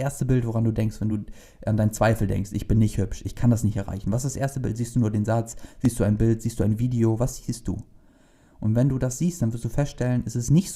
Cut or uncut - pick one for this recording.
uncut